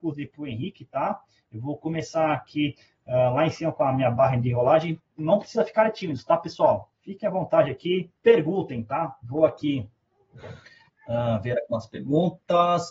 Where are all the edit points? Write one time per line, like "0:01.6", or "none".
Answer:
0:08.2